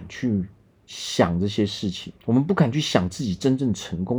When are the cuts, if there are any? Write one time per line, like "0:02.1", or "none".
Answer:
0:02.2

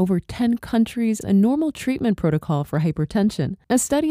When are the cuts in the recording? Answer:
0:01.2

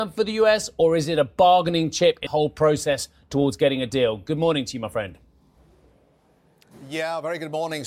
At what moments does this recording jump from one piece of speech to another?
0:02.3

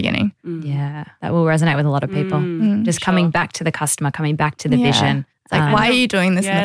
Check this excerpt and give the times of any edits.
0:05.3

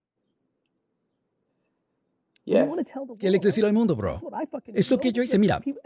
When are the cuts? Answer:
0:03.4

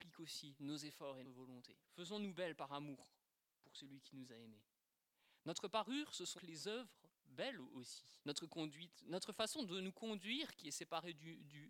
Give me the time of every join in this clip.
0:01.2
0:01.8
0:06.4
0:08.2

